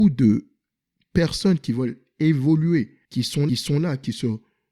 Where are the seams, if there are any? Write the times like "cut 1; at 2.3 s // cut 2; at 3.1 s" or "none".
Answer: cut 1; at 3.0 s // cut 2; at 3.5 s